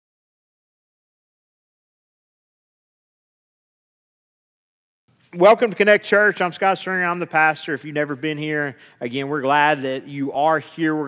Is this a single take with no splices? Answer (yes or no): yes